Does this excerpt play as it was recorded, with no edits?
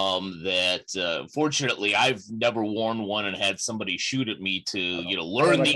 yes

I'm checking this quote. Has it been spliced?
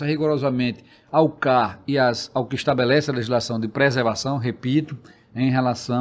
no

